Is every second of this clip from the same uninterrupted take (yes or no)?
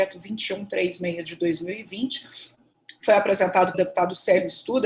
no